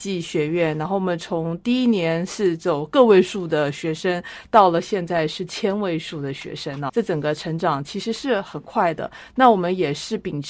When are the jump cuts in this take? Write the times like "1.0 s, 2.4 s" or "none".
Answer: 6.9 s